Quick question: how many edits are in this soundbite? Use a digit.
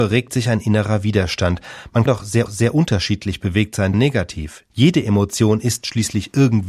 3